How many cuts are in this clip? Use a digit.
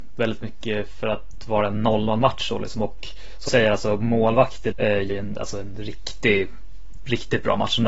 3